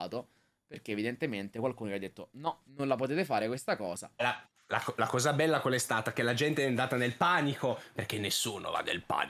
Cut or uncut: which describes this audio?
cut